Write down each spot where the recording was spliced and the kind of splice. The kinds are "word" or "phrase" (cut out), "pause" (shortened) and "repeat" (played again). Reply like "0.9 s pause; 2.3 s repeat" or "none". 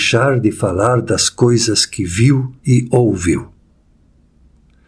2.6 s pause